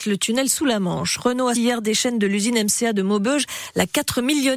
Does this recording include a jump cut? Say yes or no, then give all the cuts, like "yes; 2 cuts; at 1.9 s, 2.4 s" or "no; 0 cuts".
yes; 1 cut; at 1.5 s